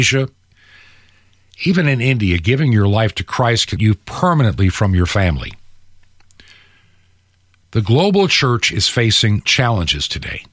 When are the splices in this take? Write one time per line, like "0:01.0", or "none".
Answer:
0:03.8
0:09.5

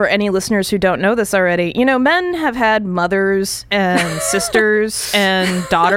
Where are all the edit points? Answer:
none

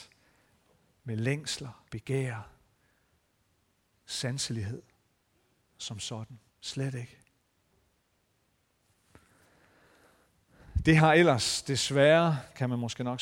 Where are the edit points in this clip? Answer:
0:01.9
0:05.3
0:06.5

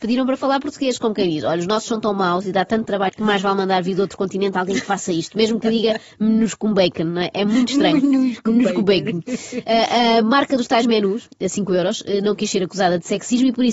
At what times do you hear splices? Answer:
0:03.1

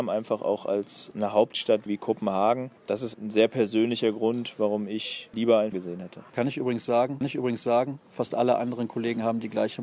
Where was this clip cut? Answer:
0:01.9
0:02.8
0:03.1
0:05.7
0:06.3
0:07.2

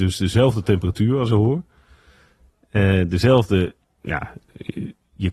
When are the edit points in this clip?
0:01.3

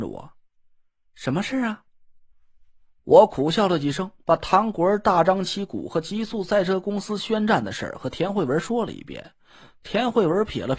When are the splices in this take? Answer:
none

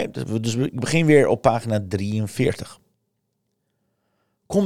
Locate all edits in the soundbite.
none

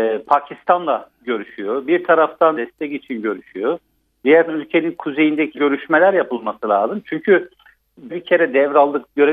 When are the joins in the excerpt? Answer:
0:02.5
0:04.5
0:05.5
0:08.1

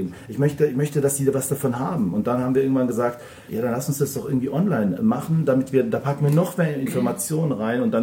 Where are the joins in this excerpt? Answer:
none

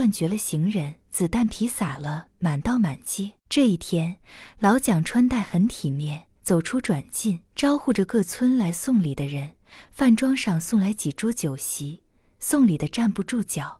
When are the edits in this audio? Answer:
0:01.0
0:03.4
0:06.3
0:07.4

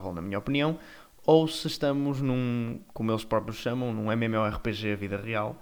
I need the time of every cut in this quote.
none

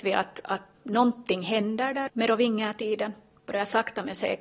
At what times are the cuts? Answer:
0:02.1

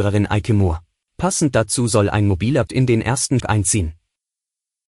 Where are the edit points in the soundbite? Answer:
0:01.0
0:02.7
0:03.4

